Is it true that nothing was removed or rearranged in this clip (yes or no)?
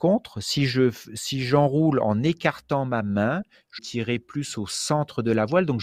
no